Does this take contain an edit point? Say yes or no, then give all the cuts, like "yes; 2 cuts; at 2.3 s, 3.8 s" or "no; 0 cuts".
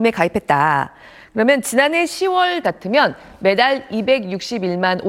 yes; 1 cut; at 2.6 s